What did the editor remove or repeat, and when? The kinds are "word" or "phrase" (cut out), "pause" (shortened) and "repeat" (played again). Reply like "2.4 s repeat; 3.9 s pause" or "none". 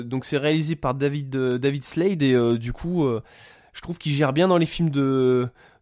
none

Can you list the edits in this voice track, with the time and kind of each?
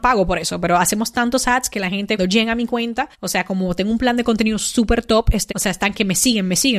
2.2 s word; 3.1 s pause; 5.5 s word

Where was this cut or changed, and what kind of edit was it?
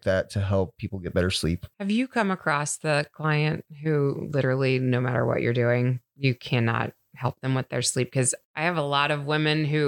none

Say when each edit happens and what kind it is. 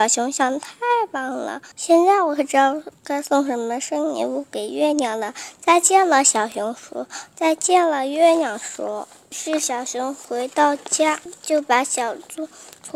1.7 s pause

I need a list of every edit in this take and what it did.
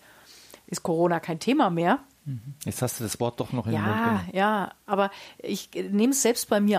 none

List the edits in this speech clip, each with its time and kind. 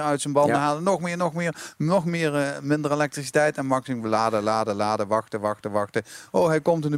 none

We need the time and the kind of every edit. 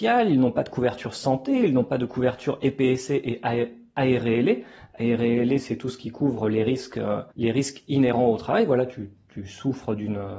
7.3 s pause

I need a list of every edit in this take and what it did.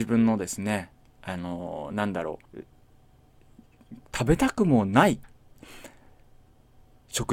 2.5 s pause

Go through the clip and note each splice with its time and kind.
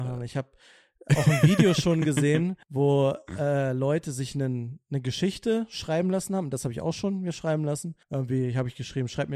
2.6 s pause; 8.0 s pause

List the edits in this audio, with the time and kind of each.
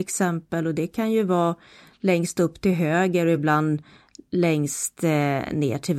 none

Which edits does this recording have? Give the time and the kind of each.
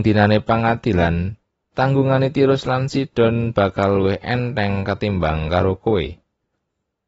none

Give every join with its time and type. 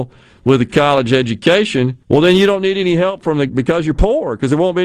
2.0 s pause; 3.5 s word

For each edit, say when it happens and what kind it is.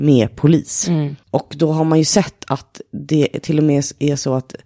1.2 s pause

